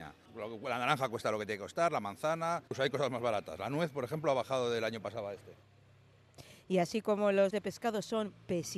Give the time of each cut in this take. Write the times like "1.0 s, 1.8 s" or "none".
7.5 s